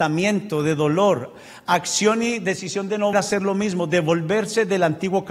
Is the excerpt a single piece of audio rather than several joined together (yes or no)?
no